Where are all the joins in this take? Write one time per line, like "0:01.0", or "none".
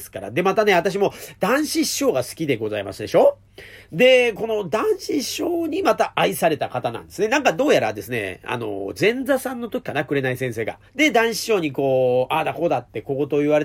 0:10.9